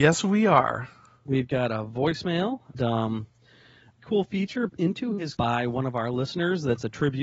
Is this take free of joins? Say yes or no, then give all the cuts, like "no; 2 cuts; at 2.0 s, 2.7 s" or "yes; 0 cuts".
no; 4 cuts; at 2.7 s, 4.0 s, 4.7 s, 5.4 s